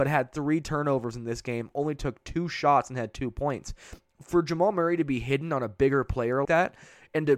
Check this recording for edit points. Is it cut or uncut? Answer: cut